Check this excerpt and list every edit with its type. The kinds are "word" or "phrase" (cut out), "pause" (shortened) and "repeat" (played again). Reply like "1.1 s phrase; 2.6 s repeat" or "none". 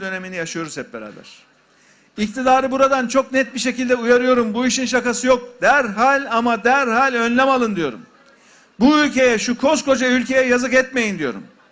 none

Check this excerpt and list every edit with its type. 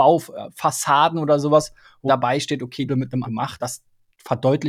2.1 s word; 2.9 s phrase; 3.2 s word; 3.6 s word

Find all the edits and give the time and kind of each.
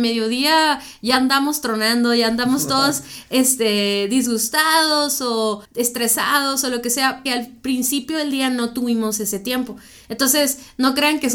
5.6 s pause; 7.3 s word

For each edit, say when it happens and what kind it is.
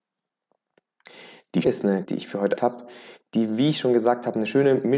1.6 s word; 2.0 s phrase; 2.6 s word

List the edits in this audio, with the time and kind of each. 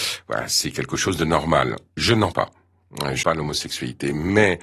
2.3 s word; 3.2 s word

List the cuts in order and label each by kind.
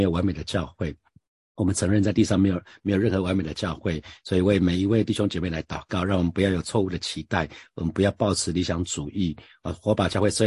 none

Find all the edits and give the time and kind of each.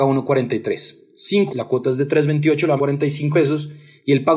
1.5 s word; 2.8 s word; 3.3 s word

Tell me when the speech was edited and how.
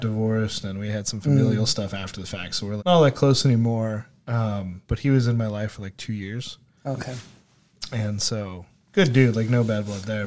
2.8 s word; 4.8 s pause

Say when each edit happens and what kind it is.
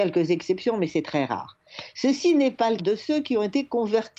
2.8 s word

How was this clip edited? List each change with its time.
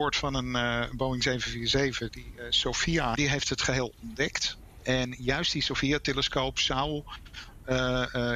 3.2 s word

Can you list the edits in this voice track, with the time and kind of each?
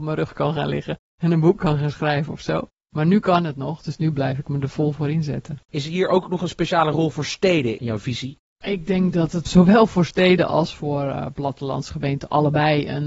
5.6 s pause

